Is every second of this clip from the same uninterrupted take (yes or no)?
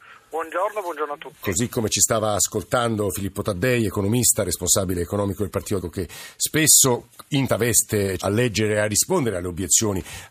no